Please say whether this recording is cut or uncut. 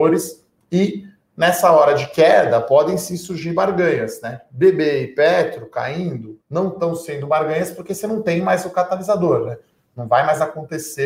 cut